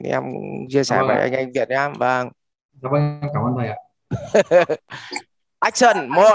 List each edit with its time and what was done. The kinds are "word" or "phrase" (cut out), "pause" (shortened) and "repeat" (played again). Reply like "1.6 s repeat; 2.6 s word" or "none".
none